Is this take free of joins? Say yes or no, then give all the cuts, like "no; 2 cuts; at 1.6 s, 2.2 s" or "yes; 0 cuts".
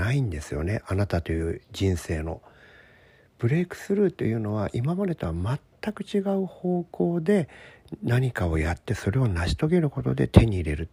yes; 0 cuts